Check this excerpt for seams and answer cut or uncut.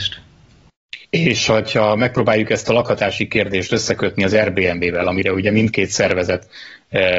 cut